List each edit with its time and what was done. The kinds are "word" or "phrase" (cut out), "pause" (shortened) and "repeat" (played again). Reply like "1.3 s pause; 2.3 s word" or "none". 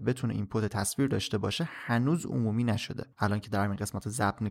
3.1 s pause